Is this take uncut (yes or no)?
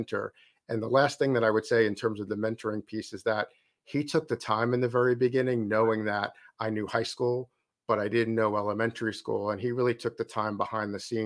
yes